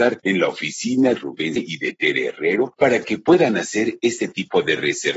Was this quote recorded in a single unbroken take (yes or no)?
no